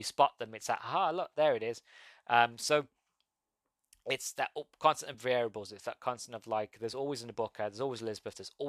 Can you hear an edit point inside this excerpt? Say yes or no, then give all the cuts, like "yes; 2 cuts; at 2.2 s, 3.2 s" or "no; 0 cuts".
no; 0 cuts